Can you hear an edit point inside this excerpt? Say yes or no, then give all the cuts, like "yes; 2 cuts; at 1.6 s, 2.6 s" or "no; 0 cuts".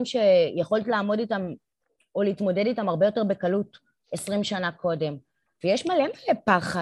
no; 0 cuts